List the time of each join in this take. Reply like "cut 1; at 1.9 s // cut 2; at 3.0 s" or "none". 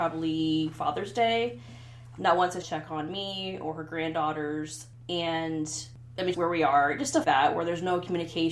cut 1; at 2.2 s // cut 2; at 2.6 s // cut 3; at 6.3 s // cut 4; at 7.2 s

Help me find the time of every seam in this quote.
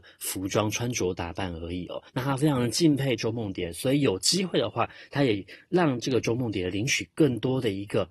cut 1; at 2.1 s

